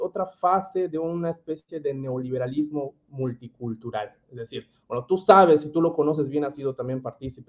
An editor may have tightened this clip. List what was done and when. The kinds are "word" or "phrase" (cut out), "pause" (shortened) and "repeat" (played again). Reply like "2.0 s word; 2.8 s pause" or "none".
none